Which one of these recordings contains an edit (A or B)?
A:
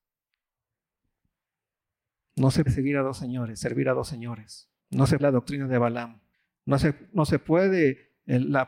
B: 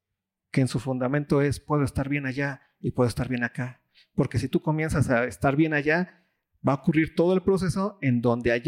A